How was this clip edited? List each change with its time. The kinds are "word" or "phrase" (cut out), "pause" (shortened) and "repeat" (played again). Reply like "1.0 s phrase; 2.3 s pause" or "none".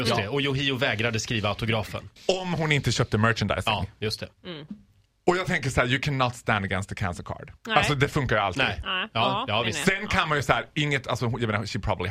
2.2 s pause; 4.3 s pause; 7.6 s pause